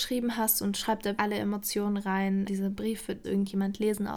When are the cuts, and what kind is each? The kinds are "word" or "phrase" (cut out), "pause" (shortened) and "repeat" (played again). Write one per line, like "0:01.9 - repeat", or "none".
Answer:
0:01.2 - word
0:02.5 - word
0:03.2 - word